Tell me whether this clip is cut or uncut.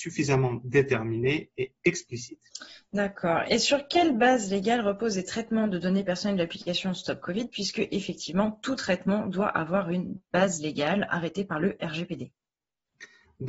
uncut